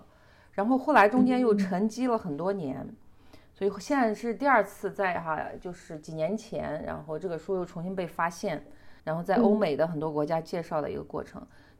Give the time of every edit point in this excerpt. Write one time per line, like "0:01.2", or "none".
0:09.0